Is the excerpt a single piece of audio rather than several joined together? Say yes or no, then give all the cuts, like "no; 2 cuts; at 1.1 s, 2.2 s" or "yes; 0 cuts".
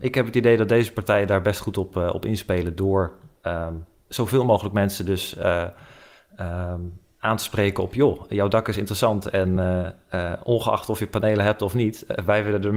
yes; 0 cuts